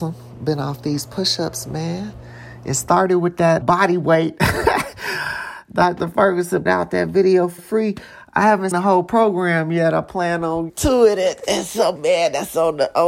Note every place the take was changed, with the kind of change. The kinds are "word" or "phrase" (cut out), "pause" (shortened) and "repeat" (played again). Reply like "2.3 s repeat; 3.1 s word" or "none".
3.6 s word; 6.7 s word; 7.6 s word; 8.7 s word; 10.7 s word; 12.0 s word